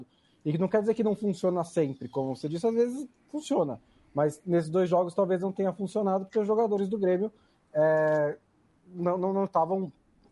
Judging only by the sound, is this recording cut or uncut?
uncut